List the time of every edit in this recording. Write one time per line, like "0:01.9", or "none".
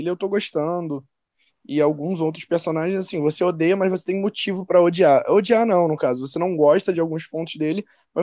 none